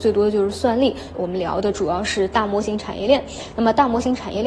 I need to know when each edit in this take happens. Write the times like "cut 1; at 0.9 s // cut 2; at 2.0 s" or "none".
cut 1; at 1.1 s